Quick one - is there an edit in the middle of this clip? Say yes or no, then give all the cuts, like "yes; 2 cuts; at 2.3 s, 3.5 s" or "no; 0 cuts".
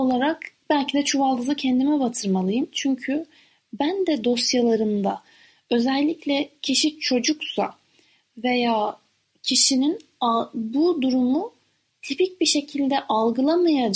no; 0 cuts